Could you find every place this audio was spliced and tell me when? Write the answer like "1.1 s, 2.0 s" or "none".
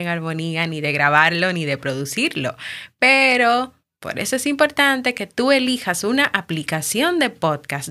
none